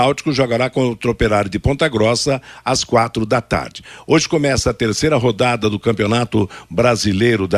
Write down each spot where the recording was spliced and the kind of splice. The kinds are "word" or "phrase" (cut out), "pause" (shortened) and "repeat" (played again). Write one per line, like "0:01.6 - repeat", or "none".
none